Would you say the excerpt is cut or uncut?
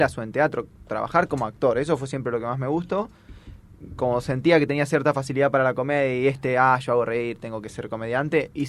uncut